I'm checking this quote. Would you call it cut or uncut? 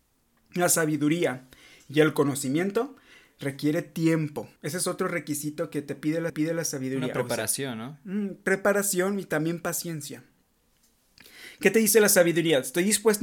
cut